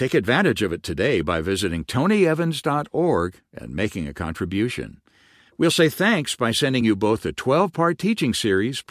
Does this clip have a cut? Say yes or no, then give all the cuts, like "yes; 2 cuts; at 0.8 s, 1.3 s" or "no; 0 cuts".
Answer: no; 0 cuts